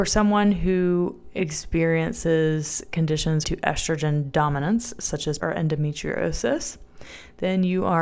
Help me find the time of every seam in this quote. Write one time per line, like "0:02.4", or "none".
0:03.4
0:05.4